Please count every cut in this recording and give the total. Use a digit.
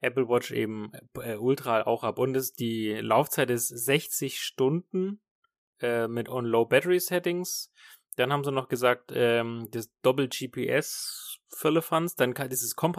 0